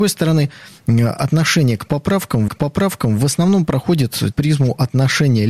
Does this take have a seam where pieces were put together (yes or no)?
yes